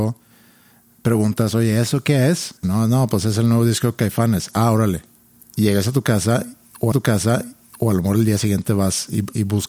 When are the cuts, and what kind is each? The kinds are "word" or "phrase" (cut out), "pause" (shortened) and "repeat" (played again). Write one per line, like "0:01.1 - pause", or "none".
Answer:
0:02.6 - pause
0:06.9 - repeat